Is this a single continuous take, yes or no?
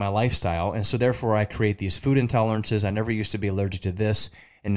yes